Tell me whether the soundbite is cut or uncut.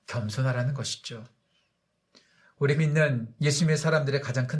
cut